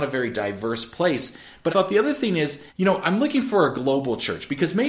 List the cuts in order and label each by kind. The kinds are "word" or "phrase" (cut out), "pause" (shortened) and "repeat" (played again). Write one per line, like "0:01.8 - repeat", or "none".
0:01.7 - word
0:02.7 - pause